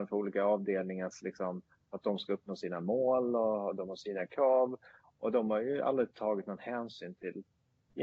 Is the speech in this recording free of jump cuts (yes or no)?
yes